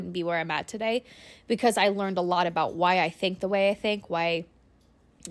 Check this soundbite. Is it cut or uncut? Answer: uncut